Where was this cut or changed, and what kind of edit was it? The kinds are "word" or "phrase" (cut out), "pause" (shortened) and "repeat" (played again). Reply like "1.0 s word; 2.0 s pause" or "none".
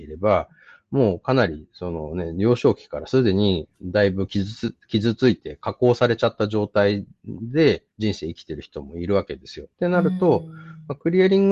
7.9 s pause; 9.7 s pause

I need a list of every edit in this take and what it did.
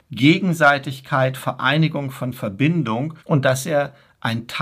1.4 s word; 3.2 s pause

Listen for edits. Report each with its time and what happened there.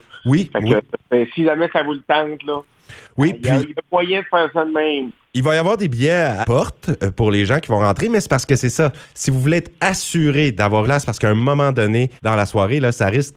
6.4 s word; 10.8 s word; 12.2 s pause

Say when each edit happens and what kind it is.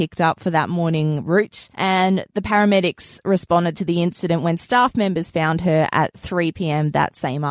1.7 s pause

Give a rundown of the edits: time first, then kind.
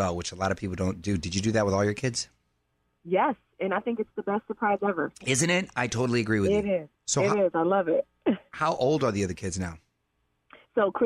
7.0 s pause

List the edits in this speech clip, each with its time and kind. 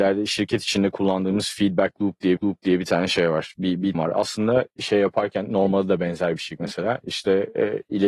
2.4 s repeat; 3.9 s word; 6.6 s word

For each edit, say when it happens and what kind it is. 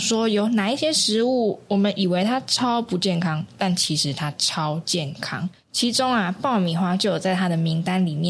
5.6 s pause

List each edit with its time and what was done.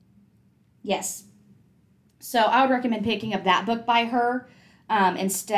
none

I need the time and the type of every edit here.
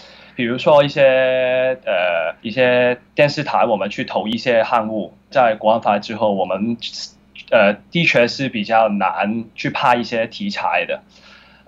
2.4 s pause; 3.1 s pause; 5.3 s word

